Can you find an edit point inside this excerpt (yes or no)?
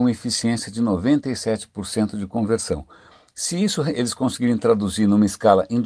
no